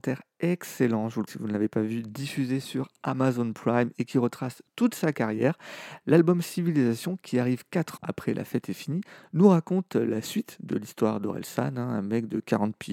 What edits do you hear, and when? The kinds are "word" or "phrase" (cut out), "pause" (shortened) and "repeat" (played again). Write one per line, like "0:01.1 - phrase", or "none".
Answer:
0:01.3 - word
0:08.0 - word